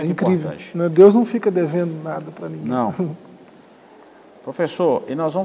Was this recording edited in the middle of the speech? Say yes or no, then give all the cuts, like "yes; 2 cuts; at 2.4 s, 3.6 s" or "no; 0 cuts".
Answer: no; 0 cuts